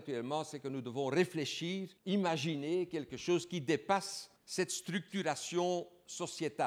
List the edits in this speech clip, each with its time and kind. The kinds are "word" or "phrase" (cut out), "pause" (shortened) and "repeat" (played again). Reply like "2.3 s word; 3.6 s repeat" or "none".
2.0 s pause; 4.4 s pause